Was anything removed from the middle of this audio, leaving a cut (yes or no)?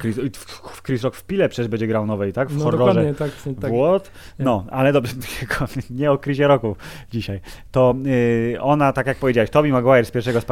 no